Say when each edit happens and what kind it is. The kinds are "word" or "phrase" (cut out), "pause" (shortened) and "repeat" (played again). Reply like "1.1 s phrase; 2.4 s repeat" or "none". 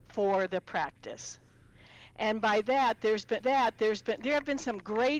3.4 s repeat